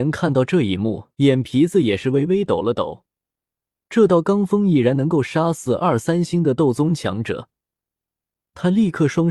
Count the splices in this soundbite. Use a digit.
1